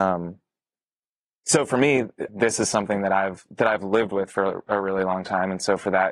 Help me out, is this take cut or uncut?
cut